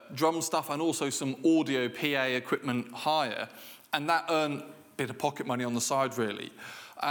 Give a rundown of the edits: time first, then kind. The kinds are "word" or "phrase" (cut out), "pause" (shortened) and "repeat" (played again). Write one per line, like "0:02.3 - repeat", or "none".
none